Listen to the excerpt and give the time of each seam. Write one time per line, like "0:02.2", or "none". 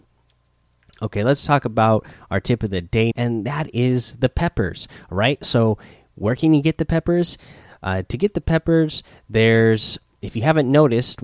0:03.1